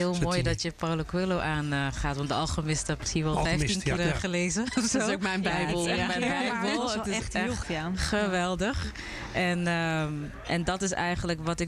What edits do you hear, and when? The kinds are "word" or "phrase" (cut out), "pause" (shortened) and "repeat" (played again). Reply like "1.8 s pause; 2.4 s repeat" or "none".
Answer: 3.0 s word; 4.0 s word; 7.6 s word